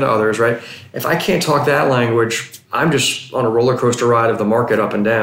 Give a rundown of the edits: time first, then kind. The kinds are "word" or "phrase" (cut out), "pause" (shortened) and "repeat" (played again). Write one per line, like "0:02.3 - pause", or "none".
0:02.6 - pause